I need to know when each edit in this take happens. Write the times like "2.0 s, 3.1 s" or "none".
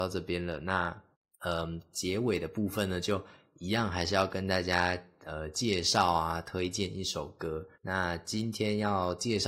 1.1 s, 7.7 s